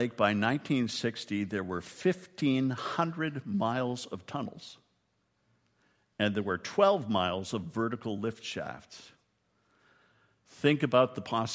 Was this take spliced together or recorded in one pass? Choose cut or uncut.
uncut